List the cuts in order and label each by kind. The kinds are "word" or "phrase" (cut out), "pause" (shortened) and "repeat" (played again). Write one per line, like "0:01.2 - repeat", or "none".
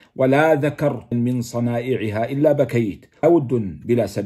0:01.1 - word
0:03.2 - word